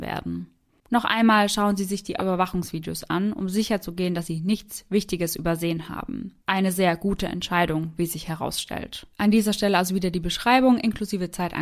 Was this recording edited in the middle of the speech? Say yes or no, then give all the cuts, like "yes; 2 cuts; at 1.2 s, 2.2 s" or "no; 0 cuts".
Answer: yes; 3 cuts; at 2.2 s, 6.4 s, 9.1 s